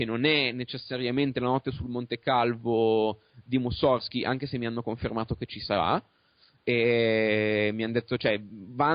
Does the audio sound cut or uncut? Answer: uncut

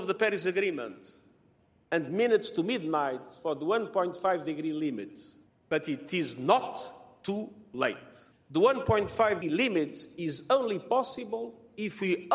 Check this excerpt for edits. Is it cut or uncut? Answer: cut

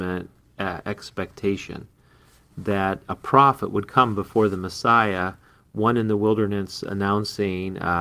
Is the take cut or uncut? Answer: uncut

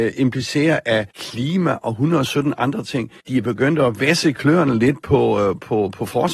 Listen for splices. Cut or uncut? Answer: cut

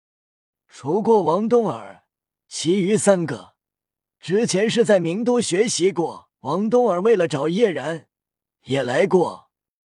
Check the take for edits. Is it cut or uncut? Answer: cut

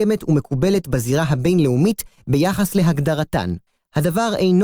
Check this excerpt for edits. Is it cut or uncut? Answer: cut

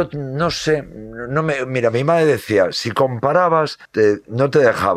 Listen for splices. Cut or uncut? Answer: cut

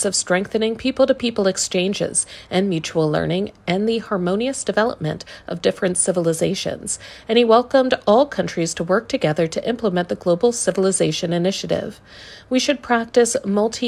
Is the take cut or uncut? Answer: uncut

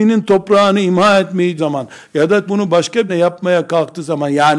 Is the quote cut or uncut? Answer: cut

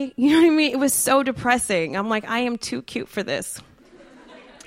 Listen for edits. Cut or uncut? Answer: uncut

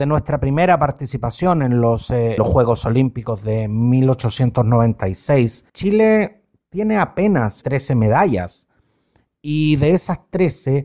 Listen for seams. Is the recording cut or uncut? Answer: cut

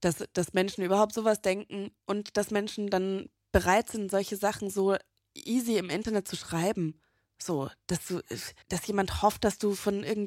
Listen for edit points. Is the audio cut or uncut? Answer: cut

